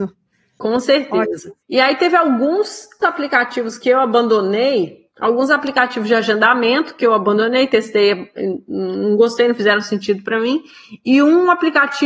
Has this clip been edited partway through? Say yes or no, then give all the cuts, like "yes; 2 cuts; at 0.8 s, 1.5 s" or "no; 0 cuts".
yes; 1 cut; at 5.1 s